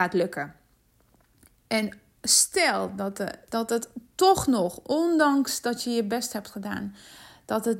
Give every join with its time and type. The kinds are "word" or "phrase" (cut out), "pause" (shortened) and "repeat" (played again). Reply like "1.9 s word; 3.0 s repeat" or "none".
none